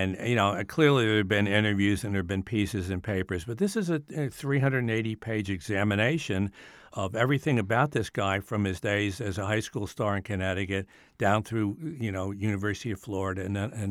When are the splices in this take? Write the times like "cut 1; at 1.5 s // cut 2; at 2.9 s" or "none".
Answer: none